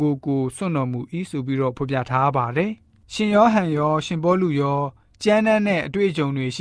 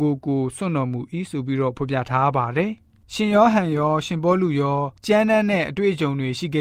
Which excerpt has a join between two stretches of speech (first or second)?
second